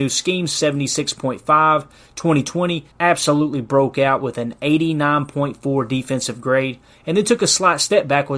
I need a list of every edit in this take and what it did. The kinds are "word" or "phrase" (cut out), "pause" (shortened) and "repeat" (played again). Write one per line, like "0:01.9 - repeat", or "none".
0:02.9 - pause